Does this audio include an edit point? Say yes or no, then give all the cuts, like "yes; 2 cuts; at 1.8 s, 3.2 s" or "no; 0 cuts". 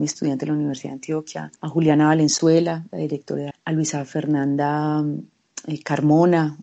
yes; 2 cuts; at 1.5 s, 3.5 s